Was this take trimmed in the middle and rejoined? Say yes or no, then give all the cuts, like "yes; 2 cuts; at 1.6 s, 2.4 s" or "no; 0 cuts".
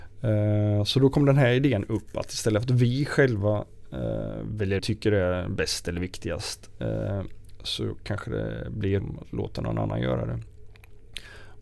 yes; 2 cuts; at 4.8 s, 9.0 s